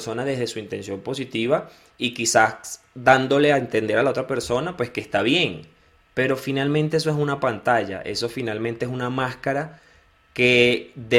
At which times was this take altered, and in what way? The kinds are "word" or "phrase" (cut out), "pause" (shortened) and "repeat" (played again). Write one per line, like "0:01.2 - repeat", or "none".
none